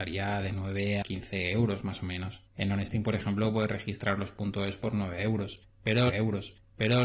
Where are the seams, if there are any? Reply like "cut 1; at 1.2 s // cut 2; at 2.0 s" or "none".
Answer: cut 1; at 1.0 s // cut 2; at 2.5 s // cut 3; at 6.1 s